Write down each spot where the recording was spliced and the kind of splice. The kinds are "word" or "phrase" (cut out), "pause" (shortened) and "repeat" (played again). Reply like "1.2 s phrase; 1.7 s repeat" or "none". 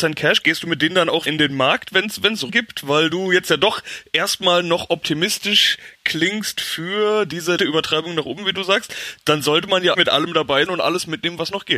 1.3 s word; 2.5 s word; 7.6 s word; 9.9 s word; 10.7 s word